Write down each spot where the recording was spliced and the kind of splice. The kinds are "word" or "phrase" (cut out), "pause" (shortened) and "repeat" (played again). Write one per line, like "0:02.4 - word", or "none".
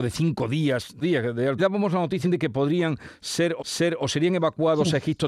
0:01.0 - word
0:01.6 - phrase
0:02.2 - word
0:03.6 - repeat